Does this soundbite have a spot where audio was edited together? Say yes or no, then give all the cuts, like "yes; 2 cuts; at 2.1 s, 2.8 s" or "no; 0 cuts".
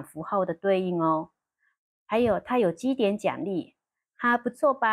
no; 0 cuts